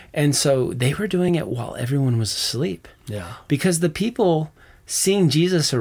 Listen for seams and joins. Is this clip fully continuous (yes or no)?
yes